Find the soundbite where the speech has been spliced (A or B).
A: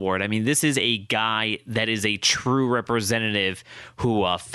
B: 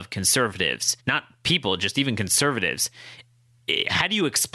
B